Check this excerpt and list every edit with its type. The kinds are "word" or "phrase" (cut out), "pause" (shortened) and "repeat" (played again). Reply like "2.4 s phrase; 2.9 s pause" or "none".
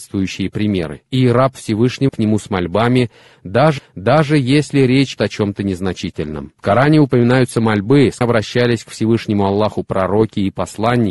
1.1 s pause; 2.1 s phrase; 3.8 s repeat; 5.2 s word; 6.6 s pause; 8.2 s word

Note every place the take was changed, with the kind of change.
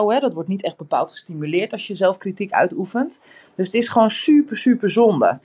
none

